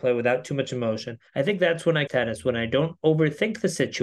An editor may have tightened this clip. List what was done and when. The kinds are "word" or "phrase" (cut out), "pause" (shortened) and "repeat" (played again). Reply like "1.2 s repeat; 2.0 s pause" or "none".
1.3 s pause; 2.1 s phrase

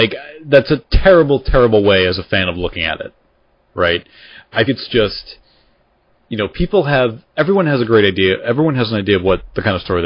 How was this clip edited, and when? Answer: 4.7 s word

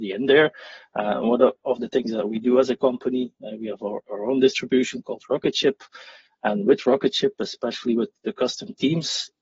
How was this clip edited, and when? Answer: none

